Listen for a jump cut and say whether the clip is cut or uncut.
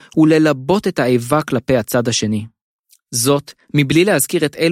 uncut